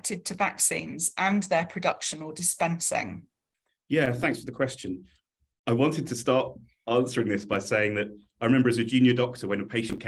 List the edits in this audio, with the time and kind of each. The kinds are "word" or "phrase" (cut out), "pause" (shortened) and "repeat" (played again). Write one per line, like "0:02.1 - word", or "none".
0:03.7 - pause